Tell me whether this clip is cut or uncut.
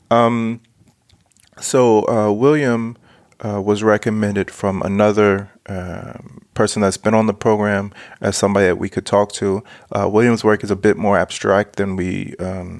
uncut